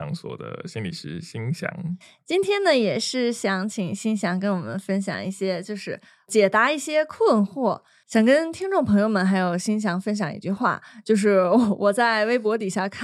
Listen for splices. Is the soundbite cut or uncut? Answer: uncut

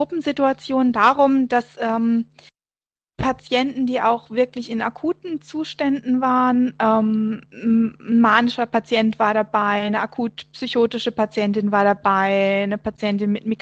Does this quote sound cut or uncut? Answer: cut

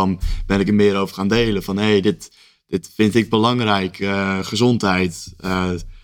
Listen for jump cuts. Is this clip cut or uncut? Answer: uncut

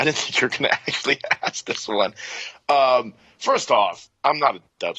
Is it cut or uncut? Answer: uncut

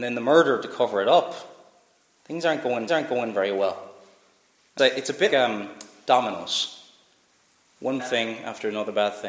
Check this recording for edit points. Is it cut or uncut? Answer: cut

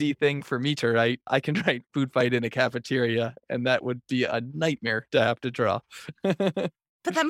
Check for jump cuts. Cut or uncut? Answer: uncut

